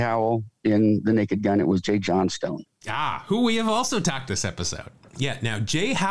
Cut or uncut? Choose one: cut